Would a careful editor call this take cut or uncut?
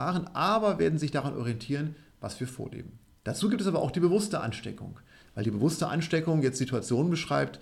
uncut